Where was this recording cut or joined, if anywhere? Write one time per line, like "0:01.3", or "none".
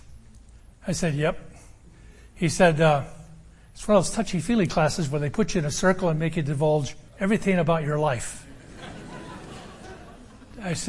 0:07.1